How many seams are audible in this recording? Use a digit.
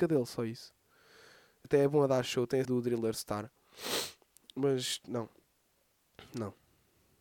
2